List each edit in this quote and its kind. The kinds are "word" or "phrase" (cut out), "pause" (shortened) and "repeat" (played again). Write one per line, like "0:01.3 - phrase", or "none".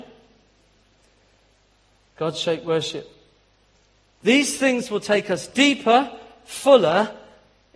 none